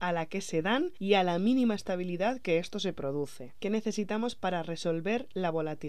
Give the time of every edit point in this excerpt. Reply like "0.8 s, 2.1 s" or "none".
none

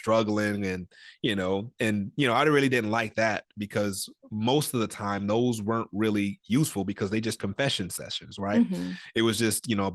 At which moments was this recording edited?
7.4 s

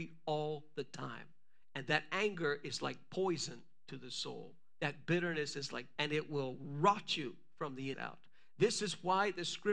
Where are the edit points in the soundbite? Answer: 6.0 s, 7.9 s

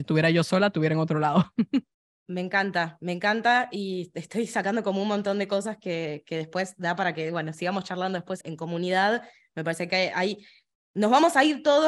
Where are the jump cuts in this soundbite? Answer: 1.9 s, 8.4 s

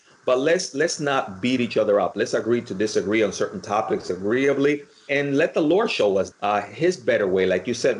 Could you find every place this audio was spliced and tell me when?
5.1 s, 6.3 s

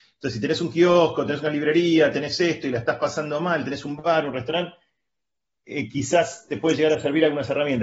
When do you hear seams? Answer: none

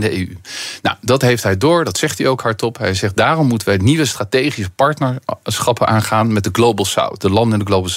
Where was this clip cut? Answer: none

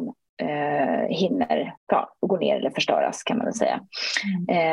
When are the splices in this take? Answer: 1.8 s

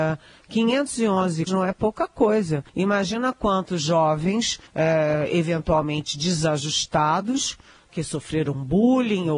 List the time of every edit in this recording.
1.5 s, 2.7 s, 4.7 s, 7.9 s

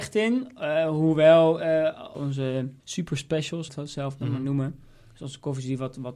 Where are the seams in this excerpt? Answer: 2.1 s, 2.8 s, 3.7 s

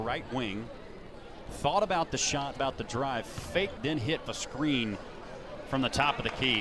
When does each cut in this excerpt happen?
2.6 s, 3.8 s, 4.3 s

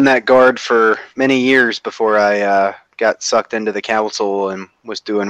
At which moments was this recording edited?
1.1 s

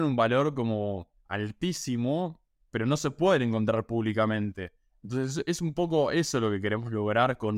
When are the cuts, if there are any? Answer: none

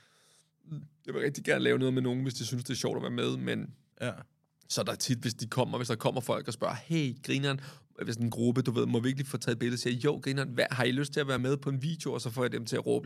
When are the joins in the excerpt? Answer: none

